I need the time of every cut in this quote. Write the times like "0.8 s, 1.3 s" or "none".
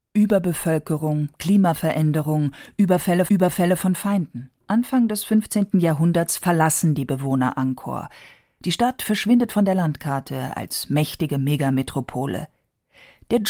3.3 s, 4.6 s